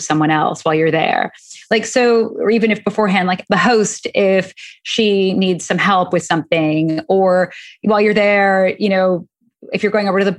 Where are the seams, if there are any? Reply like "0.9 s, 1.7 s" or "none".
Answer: 3.5 s